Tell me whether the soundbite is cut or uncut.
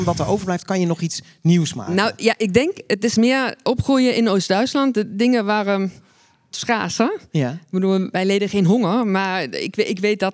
cut